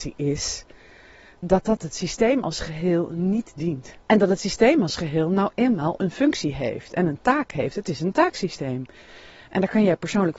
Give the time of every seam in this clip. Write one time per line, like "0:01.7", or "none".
0:04.0